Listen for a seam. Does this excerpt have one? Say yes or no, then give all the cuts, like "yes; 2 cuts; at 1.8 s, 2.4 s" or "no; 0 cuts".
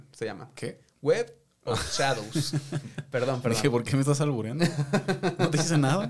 no; 0 cuts